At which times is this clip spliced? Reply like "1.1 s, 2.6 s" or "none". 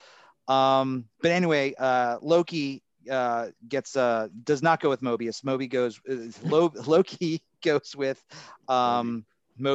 none